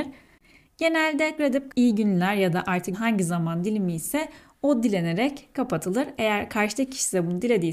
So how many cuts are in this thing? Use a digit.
3